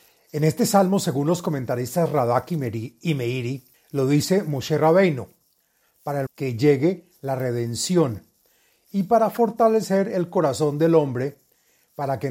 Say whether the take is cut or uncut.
cut